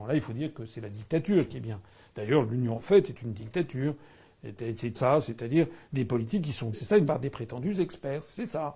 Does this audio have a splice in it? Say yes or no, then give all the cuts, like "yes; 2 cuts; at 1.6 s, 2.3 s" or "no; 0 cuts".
yes; 4 cuts; at 2.8 s, 4.9 s, 6.7 s, 7.1 s